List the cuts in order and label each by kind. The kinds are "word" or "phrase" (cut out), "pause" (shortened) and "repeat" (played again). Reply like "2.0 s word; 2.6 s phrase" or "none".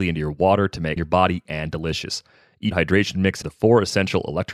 1.0 s word; 1.5 s word; 2.7 s word; 3.4 s word